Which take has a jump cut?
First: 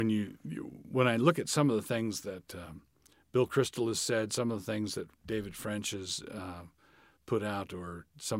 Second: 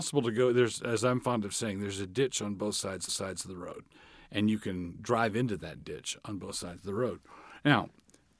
second; 1 cut; at 3.1 s

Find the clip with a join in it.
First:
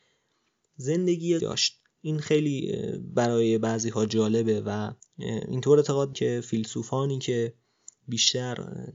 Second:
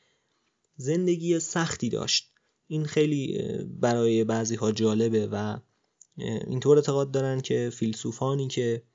first; 4 cuts; at 1.4 s, 1.9 s, 5.0 s, 6.1 s

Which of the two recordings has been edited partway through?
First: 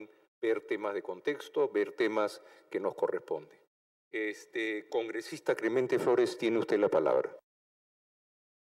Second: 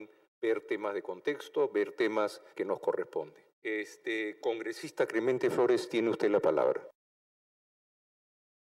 second; 2 cuts; at 2.5 s, 3.5 s

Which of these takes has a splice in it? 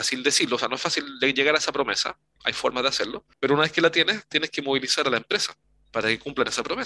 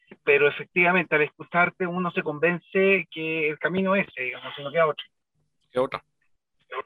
first; 2 cuts; at 3.3 s, 5.6 s

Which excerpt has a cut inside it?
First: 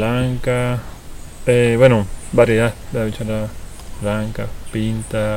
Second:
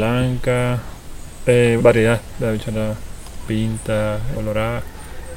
second; 3 cuts; at 1.8 s, 3.5 s, 4.3 s

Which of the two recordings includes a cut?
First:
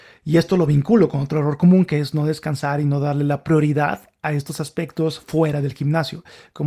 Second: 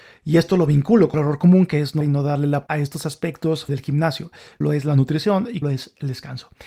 second; 6 cuts; at 1.1 s, 2.0 s, 2.7 s, 3.7 s, 4.6 s, 5.6 s

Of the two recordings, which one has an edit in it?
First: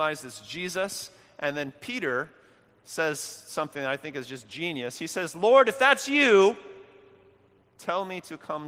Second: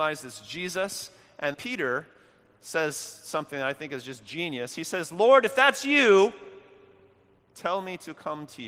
second; 1 cut; at 1.5 s

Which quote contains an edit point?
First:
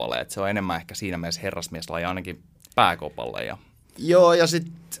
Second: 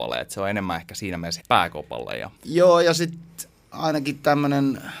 second; 2 cuts; at 1.4 s, 2.4 s

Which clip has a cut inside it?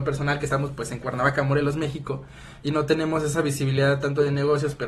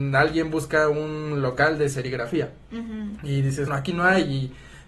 second; 2 cuts; at 2.6 s, 3.7 s

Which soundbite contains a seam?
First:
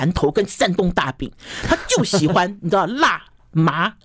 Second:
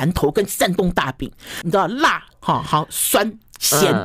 second; 2 cuts; at 1.6 s, 2.3 s

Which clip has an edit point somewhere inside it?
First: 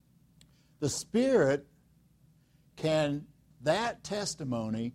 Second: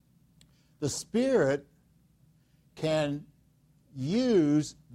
first; 1 cut; at 3.5 s

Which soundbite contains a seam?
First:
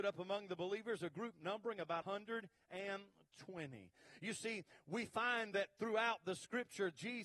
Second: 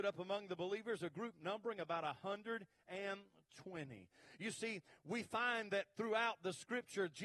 first; 1 cut; at 2.0 s

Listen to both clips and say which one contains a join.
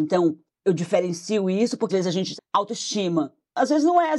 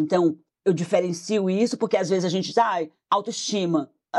first; 2 cuts; at 1.9 s, 2.4 s

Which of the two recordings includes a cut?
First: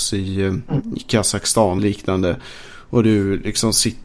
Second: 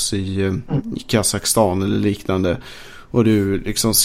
first; 1 cut; at 1.8 s

